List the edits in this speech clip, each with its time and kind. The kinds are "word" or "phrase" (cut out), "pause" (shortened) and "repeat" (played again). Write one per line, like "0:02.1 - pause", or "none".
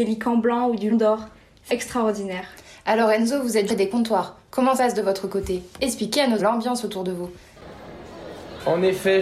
0:00.9 - word
0:01.7 - word
0:03.7 - phrase
0:04.8 - phrase
0:06.4 - word